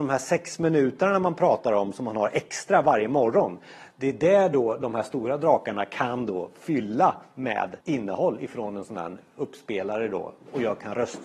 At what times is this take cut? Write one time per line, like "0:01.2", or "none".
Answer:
0:07.8